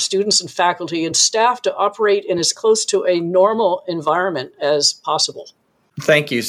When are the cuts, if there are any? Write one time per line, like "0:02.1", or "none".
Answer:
none